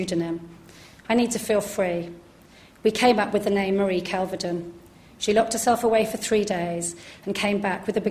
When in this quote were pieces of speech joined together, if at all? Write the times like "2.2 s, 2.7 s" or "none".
none